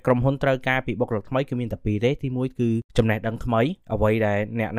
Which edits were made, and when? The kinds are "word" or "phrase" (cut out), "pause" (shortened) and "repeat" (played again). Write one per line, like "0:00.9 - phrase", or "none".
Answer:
0:02.9 - pause
0:03.8 - pause